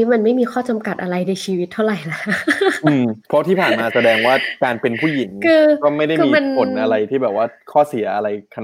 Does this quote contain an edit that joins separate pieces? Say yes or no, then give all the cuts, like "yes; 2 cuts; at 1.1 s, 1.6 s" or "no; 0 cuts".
yes; 1 cut; at 3.2 s